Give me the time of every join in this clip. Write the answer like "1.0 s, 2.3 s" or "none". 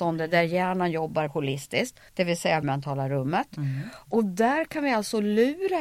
1.3 s, 2.1 s, 2.6 s